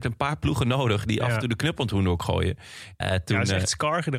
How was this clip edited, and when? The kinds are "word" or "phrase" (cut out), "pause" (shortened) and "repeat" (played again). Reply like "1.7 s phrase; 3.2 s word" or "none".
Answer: 3.0 s phrase